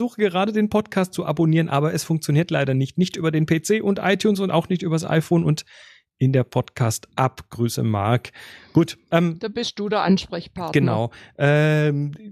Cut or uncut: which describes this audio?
uncut